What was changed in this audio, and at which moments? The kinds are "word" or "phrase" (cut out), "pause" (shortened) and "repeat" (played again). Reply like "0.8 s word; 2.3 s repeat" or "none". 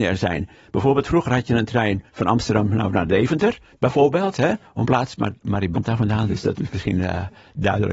2.1 s pause; 4.8 s word; 5.7 s word; 6.6 s word